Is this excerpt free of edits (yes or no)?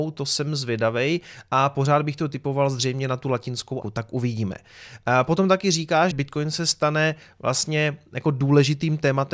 no